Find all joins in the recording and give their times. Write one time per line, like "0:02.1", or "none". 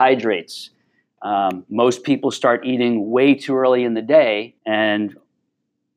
0:04.6